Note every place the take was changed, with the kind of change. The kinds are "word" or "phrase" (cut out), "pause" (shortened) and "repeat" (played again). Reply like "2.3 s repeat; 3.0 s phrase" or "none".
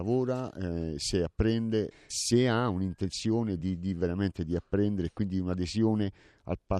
none